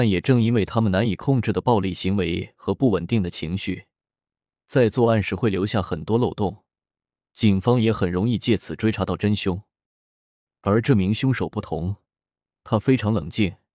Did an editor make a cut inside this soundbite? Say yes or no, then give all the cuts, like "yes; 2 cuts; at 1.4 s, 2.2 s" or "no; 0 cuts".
no; 0 cuts